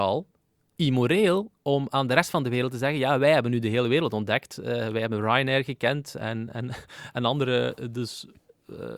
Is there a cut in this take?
yes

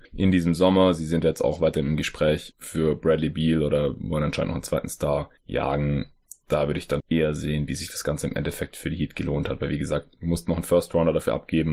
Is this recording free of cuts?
no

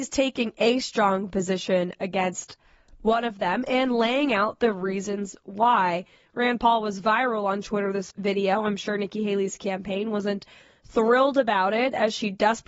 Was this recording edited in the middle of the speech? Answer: yes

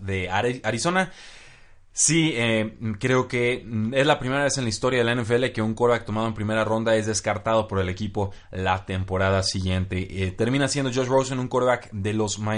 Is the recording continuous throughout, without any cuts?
yes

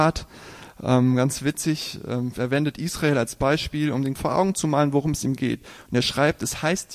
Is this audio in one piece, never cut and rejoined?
no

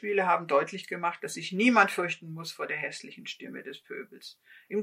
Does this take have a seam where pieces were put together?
no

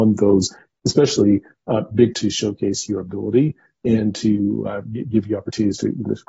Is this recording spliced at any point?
yes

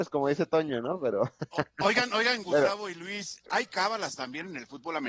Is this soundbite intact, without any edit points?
yes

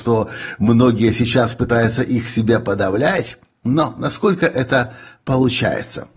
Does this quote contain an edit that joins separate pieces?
no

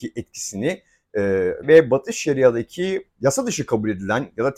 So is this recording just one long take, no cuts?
no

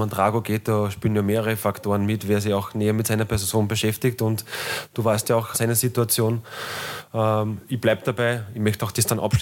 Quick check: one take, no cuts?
no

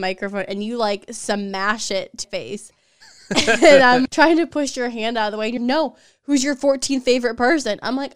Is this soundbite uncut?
no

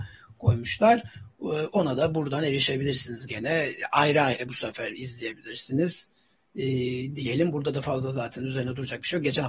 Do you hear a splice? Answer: no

